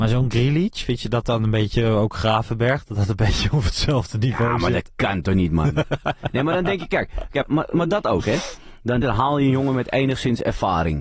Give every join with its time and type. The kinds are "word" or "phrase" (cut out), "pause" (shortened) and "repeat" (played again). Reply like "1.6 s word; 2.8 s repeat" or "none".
7.4 s word; 9.0 s phrase